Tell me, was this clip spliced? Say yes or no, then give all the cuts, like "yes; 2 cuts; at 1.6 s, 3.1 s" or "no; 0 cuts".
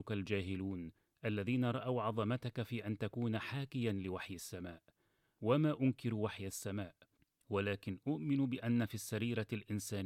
no; 0 cuts